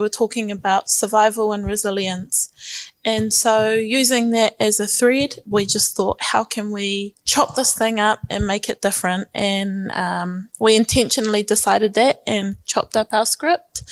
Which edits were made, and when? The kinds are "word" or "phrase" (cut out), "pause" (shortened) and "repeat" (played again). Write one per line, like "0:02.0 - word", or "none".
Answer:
none